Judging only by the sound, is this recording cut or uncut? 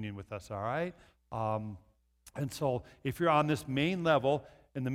uncut